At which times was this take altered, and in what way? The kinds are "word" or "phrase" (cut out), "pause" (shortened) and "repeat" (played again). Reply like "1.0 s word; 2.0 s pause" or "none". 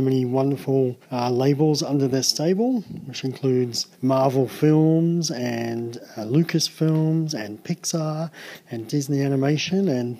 1.0 s pause; 3.9 s pause